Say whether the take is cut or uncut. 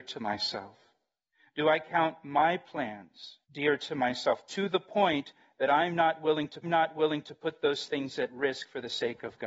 cut